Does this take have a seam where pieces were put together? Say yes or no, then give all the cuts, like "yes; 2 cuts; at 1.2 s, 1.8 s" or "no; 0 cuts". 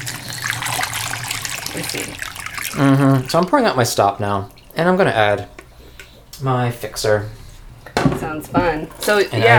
no; 0 cuts